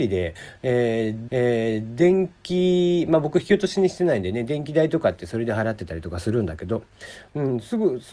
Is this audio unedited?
no; 1 cut; at 1.3 s

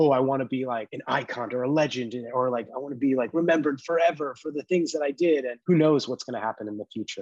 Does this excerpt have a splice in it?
yes; 1 cut; at 5.6 s

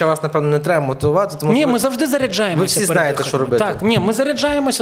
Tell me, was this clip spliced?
no; 0 cuts

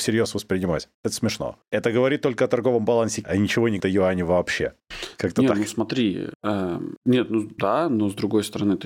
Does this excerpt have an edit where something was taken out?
yes; 3 cuts; at 3.2 s, 3.8 s, 7.6 s

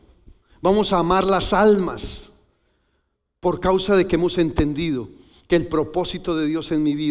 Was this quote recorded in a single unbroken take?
yes; 0 cuts

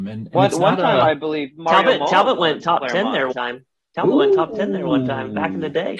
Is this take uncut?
no; 1 cut; at 3.3 s

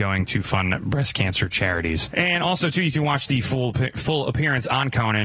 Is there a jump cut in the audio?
no; 0 cuts

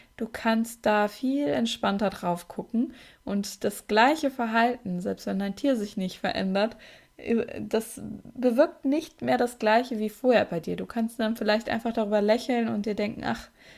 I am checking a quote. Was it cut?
no; 0 cuts

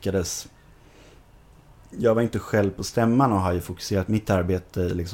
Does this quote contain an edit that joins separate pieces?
no; 0 cuts

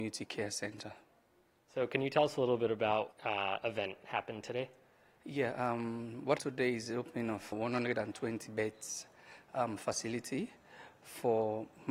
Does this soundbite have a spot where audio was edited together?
yes; 3 cuts; at 3.1 s, 6.4 s, 7.5 s

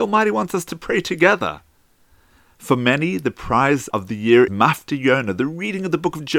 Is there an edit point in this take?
yes; 2 cuts; at 3.9 s, 4.5 s

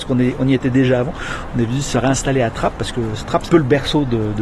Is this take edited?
yes; 1 cut; at 3.5 s

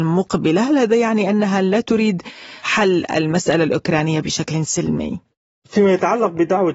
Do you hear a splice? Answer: no; 0 cuts

